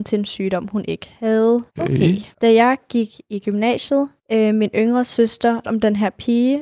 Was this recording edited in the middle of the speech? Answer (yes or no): yes